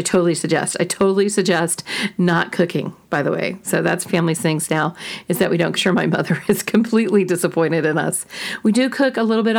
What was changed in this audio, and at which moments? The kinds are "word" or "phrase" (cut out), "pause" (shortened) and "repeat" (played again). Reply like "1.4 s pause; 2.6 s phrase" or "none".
4.1 s word; 5.8 s phrase

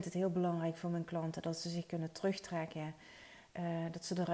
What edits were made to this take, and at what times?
none

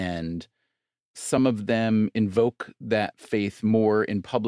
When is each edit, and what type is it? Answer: none

